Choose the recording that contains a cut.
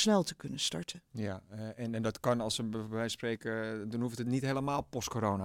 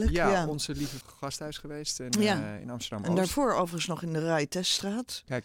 second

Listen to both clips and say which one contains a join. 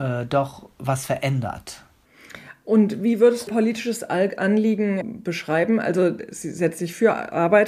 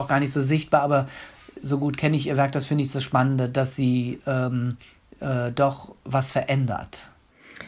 first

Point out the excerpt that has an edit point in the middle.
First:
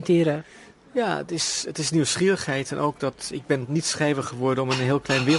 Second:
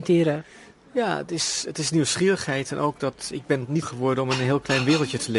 second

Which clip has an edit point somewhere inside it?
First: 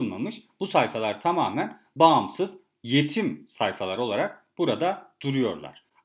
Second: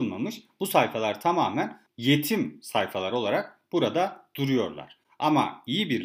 second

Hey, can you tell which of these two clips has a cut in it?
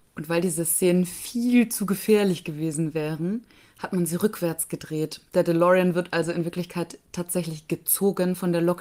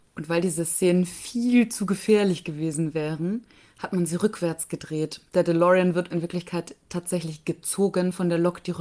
second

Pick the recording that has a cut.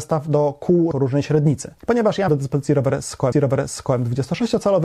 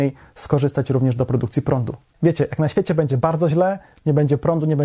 first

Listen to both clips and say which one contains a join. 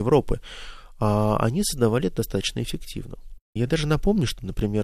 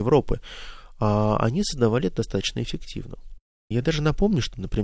first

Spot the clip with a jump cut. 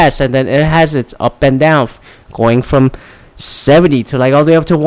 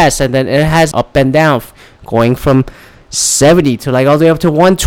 second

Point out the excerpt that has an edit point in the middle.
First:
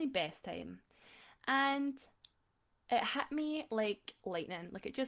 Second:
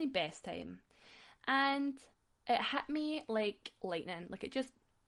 second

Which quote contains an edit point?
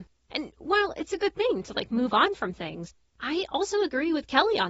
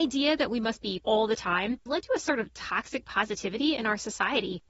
second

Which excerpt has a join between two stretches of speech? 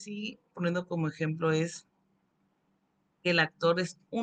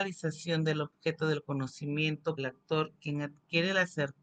second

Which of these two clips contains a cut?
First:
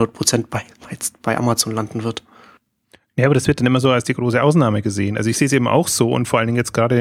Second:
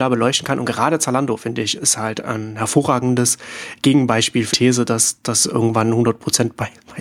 second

